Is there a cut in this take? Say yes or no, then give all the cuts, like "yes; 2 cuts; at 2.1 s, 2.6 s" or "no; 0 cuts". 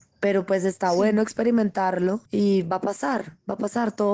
yes; 1 cut; at 2.3 s